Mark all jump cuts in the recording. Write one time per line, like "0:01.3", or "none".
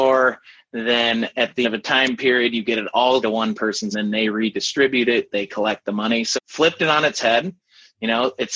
0:01.6
0:03.2
0:03.9
0:06.3